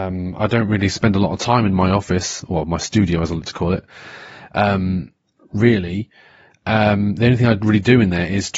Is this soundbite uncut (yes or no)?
yes